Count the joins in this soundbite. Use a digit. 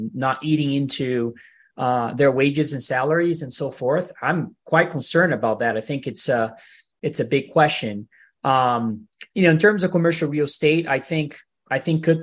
0